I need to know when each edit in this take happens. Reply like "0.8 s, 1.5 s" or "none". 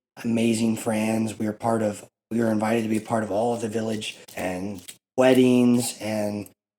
4.3 s